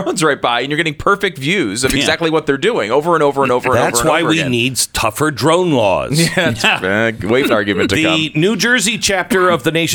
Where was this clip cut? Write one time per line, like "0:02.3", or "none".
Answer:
0:07.5